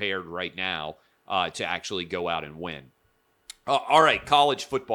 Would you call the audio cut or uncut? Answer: uncut